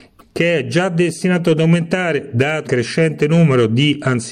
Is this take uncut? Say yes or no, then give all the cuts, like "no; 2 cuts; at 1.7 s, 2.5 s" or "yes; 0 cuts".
no; 1 cut; at 2.6 s